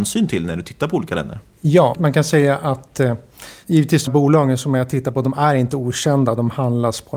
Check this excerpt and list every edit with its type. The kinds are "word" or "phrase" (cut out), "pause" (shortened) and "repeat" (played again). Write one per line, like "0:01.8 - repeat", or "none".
0:01.9 - word
0:04.1 - word

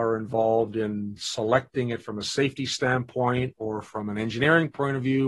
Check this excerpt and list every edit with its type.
none

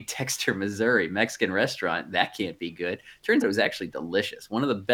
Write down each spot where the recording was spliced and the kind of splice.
0:03.4 - word

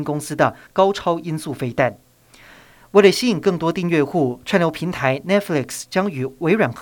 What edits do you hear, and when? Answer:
none

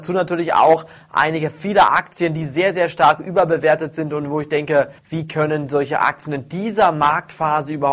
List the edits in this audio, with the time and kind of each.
0:05.0 - pause

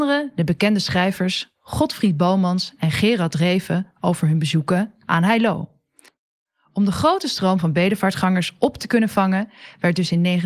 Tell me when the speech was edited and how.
none

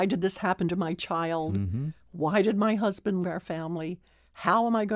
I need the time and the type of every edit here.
0:03.2 - word

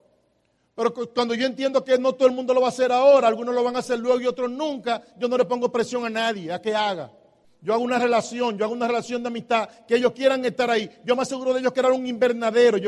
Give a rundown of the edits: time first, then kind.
0:07.4 - pause

